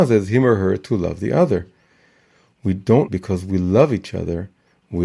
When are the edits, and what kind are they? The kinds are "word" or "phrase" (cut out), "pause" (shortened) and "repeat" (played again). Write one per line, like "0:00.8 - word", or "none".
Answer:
0:03.1 - word